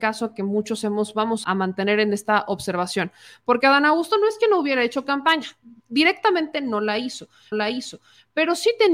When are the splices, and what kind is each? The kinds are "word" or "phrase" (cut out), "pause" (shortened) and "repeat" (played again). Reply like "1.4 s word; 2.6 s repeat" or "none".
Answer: 1.4 s word; 7.5 s repeat